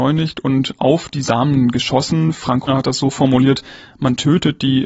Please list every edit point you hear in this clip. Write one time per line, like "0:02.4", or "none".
0:02.7